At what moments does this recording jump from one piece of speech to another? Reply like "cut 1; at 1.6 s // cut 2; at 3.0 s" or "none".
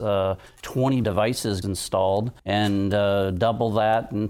cut 1; at 1.0 s // cut 2; at 1.6 s // cut 3; at 2.4 s